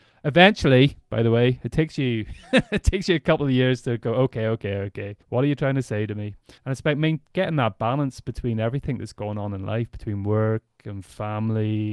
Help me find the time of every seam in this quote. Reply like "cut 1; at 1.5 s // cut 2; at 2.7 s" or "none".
cut 1; at 5.2 s // cut 2; at 6.6 s